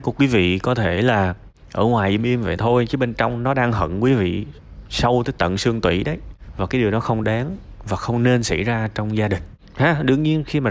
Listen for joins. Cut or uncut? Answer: uncut